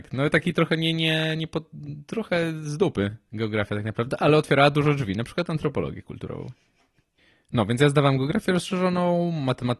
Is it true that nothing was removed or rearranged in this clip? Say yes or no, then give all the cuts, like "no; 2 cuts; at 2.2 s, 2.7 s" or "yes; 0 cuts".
yes; 0 cuts